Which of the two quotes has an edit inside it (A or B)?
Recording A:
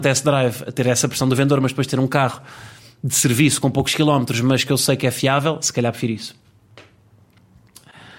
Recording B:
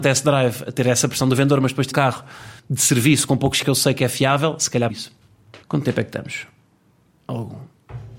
B